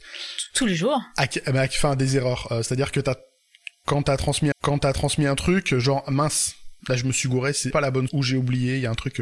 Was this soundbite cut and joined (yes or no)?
yes